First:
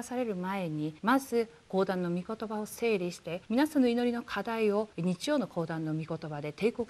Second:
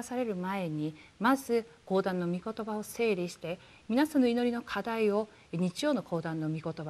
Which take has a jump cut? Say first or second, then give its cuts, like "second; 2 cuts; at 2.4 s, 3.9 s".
first; 3 cuts; at 1.0 s, 3.4 s, 4.9 s